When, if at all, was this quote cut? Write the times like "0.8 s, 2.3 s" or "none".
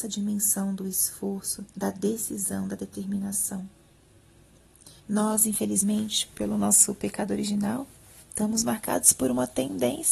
1.7 s, 5.0 s